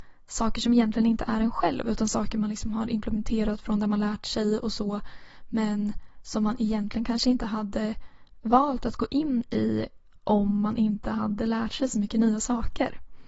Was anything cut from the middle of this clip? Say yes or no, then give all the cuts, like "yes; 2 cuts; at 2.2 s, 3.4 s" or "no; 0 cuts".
no; 0 cuts